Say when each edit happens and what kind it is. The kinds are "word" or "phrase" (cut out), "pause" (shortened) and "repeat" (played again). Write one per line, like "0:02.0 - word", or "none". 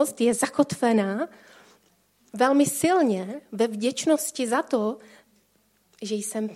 none